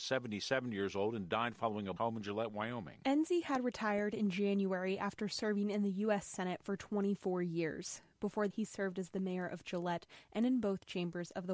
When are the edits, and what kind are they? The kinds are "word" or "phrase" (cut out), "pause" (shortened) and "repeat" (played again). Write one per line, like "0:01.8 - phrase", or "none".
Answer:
0:02.0 - phrase
0:08.5 - word